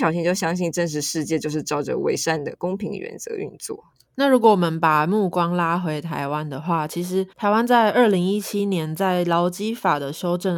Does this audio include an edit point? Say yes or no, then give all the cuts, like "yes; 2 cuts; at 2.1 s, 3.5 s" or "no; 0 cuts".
yes; 1 cut; at 7.3 s